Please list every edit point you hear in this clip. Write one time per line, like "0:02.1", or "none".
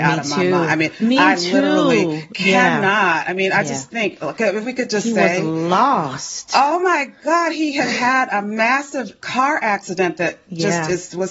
none